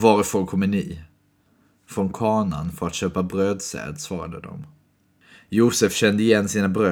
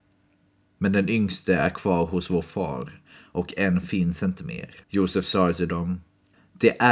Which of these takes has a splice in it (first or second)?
second